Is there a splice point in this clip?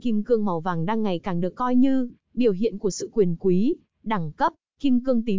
no; 0 cuts

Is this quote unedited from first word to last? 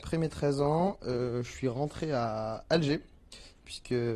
yes; 0 cuts

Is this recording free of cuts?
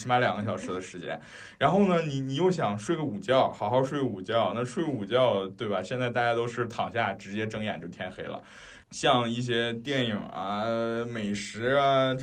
yes; 0 cuts

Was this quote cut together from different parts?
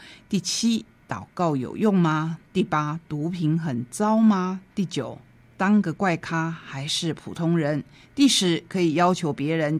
no; 0 cuts

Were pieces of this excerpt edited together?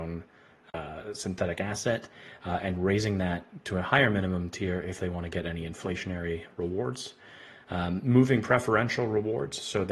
no; 0 cuts

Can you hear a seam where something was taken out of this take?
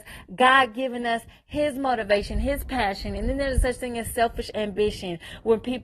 no; 0 cuts

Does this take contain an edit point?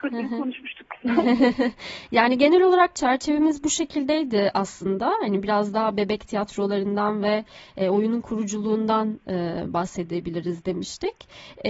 no; 0 cuts

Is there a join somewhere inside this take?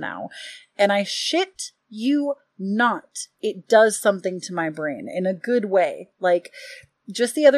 no; 0 cuts

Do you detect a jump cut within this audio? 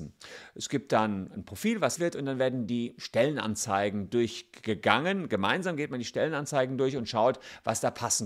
yes; 1 cut; at 2.0 s

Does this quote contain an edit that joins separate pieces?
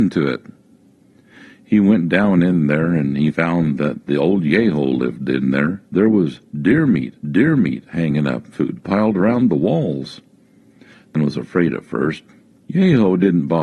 yes; 5 cuts; at 5.9 s, 7.2 s, 8.5 s, 11.1 s, 12.6 s

